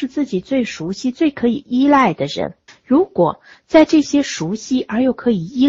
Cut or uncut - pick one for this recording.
cut